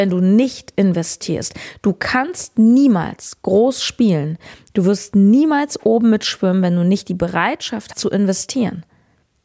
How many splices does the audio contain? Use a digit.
1